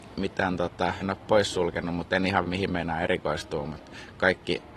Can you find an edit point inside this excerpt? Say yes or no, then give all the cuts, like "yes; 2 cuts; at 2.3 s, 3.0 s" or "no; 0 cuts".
yes; 2 cuts; at 1.0 s, 2.4 s